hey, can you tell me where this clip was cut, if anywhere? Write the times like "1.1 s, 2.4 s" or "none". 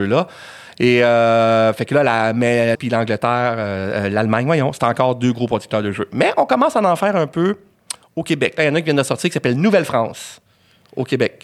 2.7 s